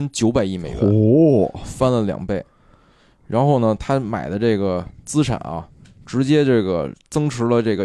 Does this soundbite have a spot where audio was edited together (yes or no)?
yes